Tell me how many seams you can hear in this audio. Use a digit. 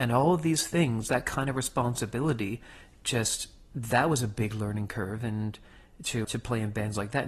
1